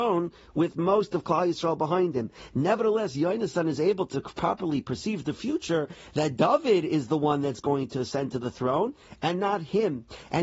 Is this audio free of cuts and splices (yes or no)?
yes